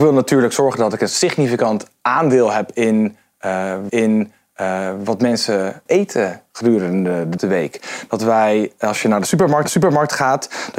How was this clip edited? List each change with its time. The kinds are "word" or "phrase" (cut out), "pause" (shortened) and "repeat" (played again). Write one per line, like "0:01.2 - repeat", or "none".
0:03.9 - repeat
0:05.9 - word
0:07.4 - word
0:09.6 - repeat